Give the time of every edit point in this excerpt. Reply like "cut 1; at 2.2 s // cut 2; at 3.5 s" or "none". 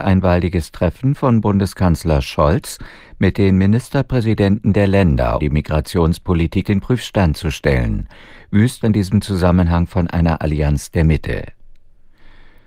cut 1; at 5.4 s // cut 2; at 6.6 s // cut 3; at 8.8 s